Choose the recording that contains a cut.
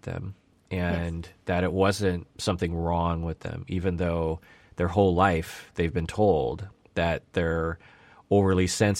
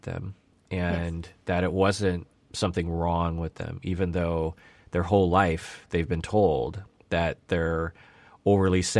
first; 1 cut; at 2.3 s

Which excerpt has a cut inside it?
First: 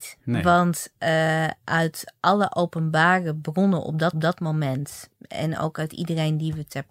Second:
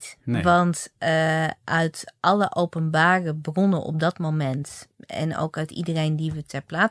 first; 1 cut; at 4.1 s

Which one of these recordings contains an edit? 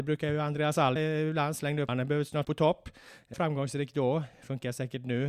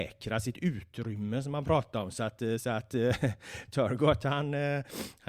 first; 4 cuts; at 1.0 s, 1.9 s, 2.4 s, 3.3 s

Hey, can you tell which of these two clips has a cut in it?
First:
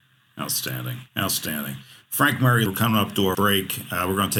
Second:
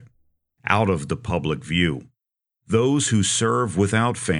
first; 3 cuts; at 1.1 s, 2.7 s, 3.3 s

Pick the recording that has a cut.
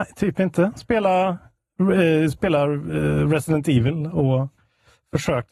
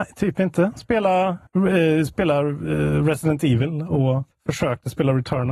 second; 2 cuts; at 1.5 s, 4.3 s

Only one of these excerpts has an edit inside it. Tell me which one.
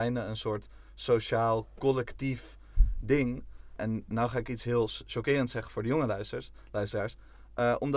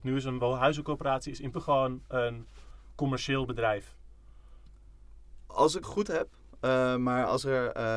second; 2 cuts; at 1.5 s, 5.8 s

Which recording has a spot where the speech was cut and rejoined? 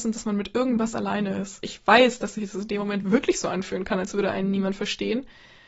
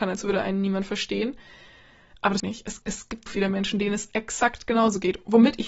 second; 3 cuts; at 2.4 s, 2.8 s, 3.3 s

